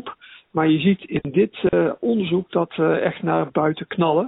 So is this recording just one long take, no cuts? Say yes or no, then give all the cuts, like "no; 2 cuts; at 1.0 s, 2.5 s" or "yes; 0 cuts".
yes; 0 cuts